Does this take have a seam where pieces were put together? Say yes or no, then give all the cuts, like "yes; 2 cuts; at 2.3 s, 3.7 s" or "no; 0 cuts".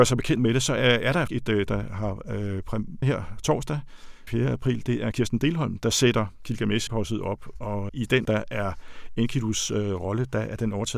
yes; 8 cuts; at 1.3 s, 1.7 s, 3.0 s, 4.3 s, 5.1 s, 6.9 s, 7.9 s, 8.2 s